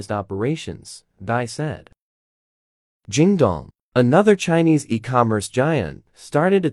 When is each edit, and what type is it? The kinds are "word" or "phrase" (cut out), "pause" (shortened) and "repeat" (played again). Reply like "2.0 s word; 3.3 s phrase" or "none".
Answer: none